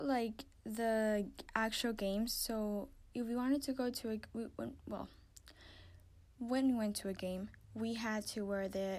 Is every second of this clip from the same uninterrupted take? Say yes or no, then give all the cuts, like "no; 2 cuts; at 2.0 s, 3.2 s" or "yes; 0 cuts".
yes; 0 cuts